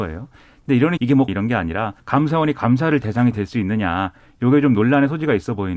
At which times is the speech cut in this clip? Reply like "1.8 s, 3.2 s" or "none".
1.0 s, 1.3 s, 2.0 s, 3.0 s